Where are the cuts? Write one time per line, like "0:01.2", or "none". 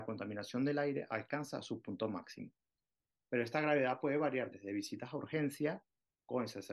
none